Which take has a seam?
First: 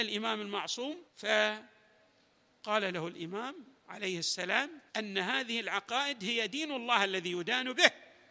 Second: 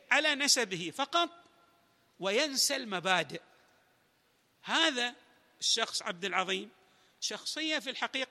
first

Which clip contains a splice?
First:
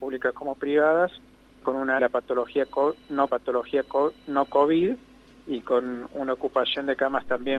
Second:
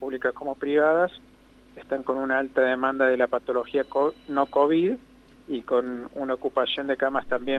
first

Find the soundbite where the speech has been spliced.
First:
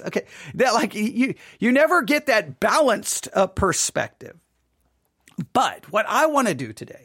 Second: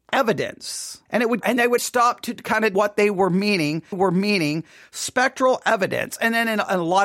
second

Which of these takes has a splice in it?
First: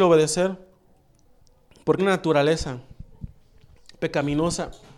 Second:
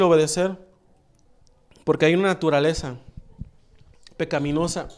first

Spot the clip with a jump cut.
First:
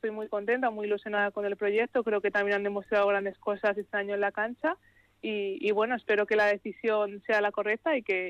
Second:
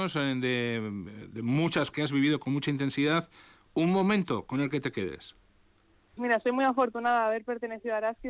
second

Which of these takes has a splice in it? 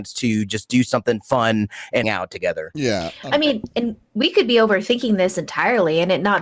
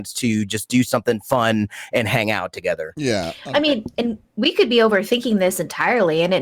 first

